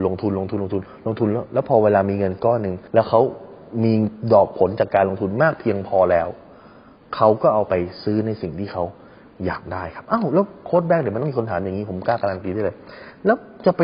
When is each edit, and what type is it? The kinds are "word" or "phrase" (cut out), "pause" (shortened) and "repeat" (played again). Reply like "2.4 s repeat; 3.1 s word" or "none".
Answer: 2.9 s pause